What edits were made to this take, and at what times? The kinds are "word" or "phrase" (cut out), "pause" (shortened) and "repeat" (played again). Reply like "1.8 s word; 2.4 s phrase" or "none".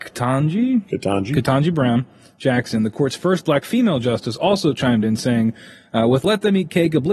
none